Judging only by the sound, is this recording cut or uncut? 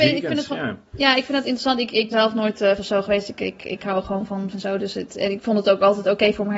cut